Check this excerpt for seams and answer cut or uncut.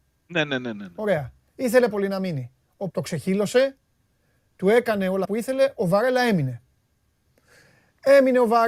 cut